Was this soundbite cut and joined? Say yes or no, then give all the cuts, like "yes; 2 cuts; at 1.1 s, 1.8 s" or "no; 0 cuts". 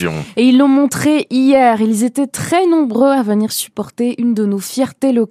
no; 0 cuts